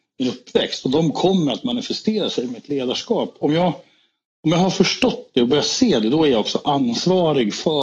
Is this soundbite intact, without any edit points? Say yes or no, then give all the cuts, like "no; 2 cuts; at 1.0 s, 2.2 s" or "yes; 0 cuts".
yes; 0 cuts